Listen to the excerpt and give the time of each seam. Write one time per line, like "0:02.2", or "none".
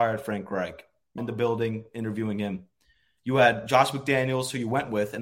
0:01.2